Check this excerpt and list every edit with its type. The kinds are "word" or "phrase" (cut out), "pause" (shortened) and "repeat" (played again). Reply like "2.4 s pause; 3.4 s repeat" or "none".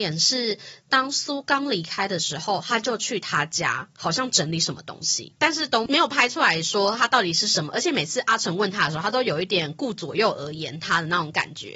5.4 s pause